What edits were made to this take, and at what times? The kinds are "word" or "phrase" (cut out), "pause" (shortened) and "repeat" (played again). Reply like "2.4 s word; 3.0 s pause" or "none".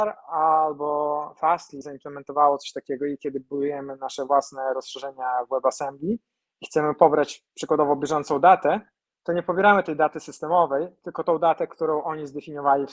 none